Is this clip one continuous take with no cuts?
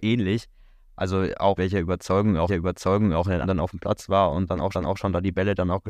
no; 4 cuts; at 1.6 s, 2.5 s, 3.4 s, 4.7 s

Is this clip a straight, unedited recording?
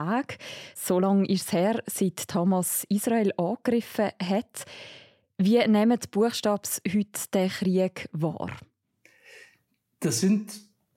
yes; 0 cuts

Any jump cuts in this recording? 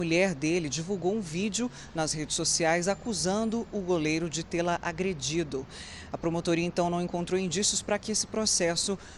no; 0 cuts

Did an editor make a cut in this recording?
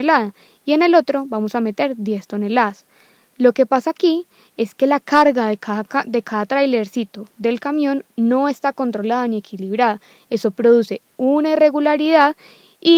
no; 0 cuts

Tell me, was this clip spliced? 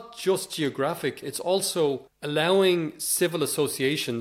yes; 2 cuts; at 1.2 s, 2.1 s

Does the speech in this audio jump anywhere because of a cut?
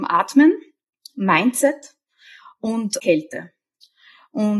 yes; 1 cut; at 3.0 s

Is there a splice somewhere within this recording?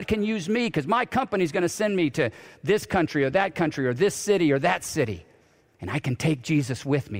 no; 0 cuts

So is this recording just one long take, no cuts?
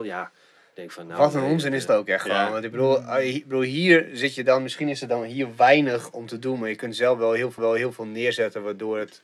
no; 2 cuts; at 1.9 s, 7.6 s

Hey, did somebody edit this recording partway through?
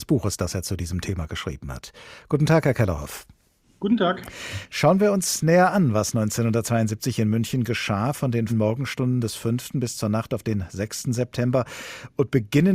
yes; 1 cut; at 8.5 s

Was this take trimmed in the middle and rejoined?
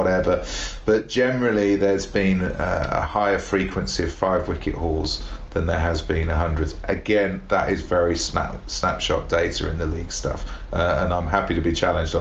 no; 0 cuts

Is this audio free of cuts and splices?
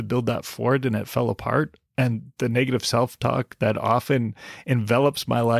yes; 0 cuts

